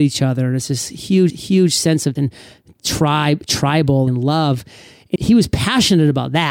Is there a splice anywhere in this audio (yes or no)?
yes